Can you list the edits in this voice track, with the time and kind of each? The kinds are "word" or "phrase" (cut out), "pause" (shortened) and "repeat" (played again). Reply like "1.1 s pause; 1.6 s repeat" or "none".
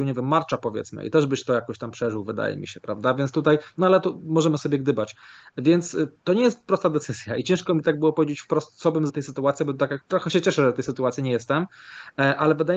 6.2 s pause; 9.1 s word; 10.0 s word